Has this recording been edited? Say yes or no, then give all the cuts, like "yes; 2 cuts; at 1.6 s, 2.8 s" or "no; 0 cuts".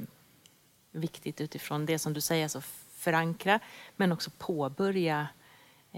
no; 0 cuts